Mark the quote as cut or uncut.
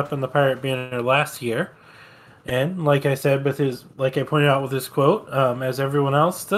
uncut